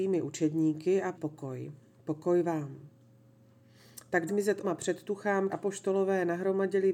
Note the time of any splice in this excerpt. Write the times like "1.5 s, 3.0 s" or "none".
1.1 s, 4.3 s, 4.6 s, 5.5 s

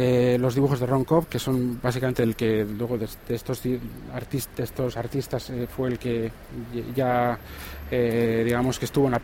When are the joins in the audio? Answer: none

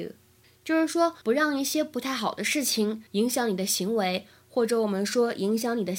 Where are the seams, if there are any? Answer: 1.2 s, 3.1 s

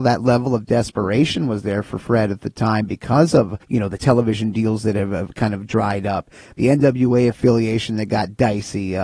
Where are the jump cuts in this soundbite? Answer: 3.6 s

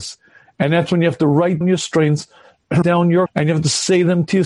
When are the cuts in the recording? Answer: 1.6 s, 2.8 s, 3.3 s

